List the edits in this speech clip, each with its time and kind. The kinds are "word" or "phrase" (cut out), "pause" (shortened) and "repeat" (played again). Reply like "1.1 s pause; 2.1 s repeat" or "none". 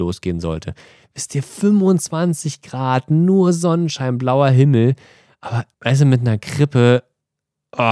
5.7 s pause